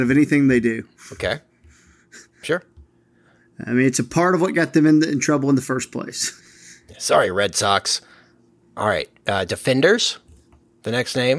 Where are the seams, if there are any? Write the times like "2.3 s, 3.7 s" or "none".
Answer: 6.4 s

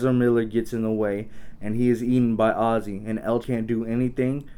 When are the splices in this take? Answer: 3.4 s

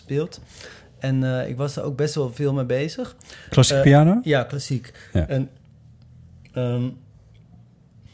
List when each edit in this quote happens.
none

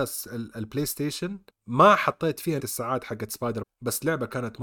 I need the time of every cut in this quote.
1.5 s, 2.6 s, 3.6 s

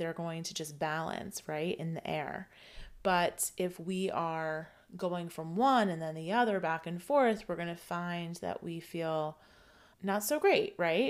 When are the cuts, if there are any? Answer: none

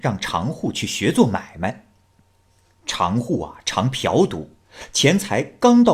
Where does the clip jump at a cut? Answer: none

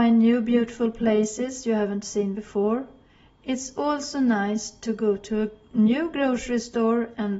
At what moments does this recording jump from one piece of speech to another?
none

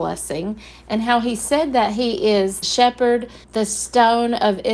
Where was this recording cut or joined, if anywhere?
2.6 s, 3.4 s

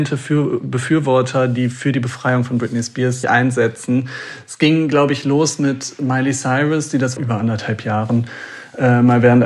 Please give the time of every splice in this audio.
3.2 s, 7.2 s

